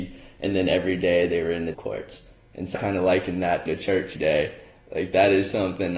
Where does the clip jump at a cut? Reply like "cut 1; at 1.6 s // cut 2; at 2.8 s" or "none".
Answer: cut 1; at 1.7 s // cut 2; at 2.7 s // cut 3; at 3.7 s // cut 4; at 4.1 s